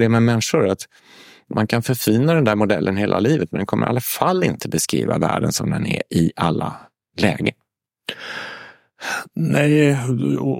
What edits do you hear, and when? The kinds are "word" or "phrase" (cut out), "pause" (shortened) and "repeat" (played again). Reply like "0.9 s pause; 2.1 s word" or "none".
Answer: none